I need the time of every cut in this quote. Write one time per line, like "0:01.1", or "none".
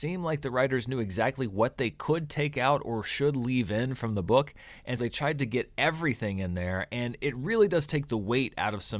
0:05.0